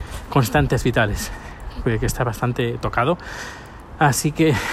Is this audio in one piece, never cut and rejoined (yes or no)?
yes